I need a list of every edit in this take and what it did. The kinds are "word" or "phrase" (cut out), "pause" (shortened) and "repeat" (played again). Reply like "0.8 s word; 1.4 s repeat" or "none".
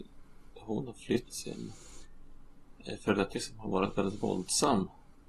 1.2 s word; 3.3 s word